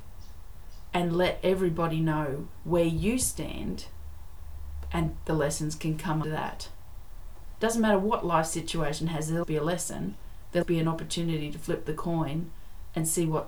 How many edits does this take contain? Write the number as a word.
four